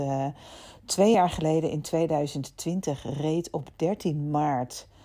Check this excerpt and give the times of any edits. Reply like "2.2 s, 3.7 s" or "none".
none